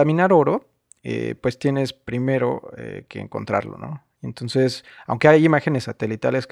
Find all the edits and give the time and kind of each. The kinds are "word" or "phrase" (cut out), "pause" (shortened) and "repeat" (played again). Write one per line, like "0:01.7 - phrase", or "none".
none